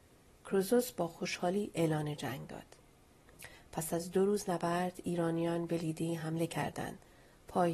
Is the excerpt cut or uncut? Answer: uncut